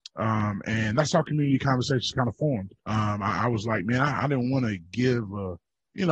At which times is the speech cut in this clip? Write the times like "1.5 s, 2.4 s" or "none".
2.8 s

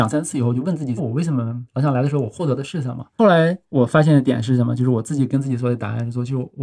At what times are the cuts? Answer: 1.0 s

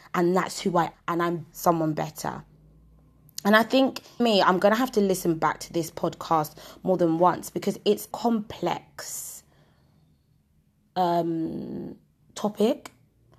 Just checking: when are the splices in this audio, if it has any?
0.9 s, 1.5 s, 4.2 s, 8.1 s

